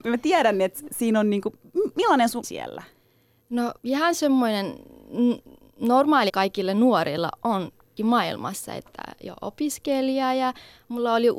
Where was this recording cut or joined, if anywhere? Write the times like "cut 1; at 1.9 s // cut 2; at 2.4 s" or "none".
cut 1; at 1.9 s // cut 2; at 2.4 s // cut 3; at 3.8 s // cut 4; at 6.3 s // cut 5; at 8.0 s